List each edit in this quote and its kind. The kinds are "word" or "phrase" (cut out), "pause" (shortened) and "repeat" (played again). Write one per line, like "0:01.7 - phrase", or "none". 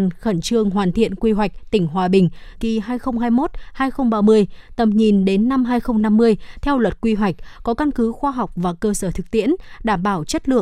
0:02.6 - word